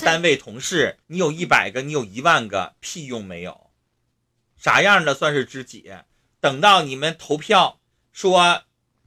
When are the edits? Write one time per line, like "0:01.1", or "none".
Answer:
0:01.0